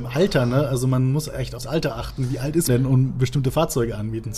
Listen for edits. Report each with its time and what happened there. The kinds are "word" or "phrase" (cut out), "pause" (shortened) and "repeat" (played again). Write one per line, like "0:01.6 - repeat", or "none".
0:01.6 - word
0:02.7 - word